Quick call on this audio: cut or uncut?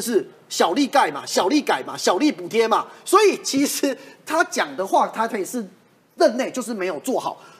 uncut